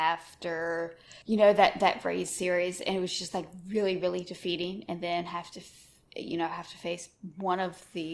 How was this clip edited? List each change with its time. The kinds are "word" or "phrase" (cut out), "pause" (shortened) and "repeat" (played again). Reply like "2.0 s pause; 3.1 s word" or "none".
1.2 s pause